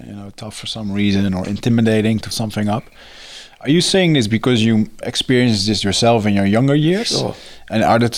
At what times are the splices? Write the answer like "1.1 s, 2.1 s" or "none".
2.3 s, 5.0 s